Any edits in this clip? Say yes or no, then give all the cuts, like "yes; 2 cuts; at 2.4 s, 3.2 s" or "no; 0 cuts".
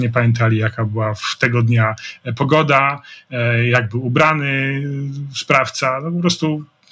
no; 0 cuts